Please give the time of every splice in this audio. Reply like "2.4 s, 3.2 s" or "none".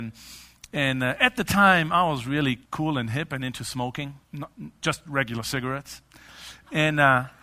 2.6 s, 4.2 s